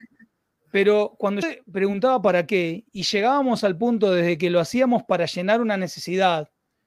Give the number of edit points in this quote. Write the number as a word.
two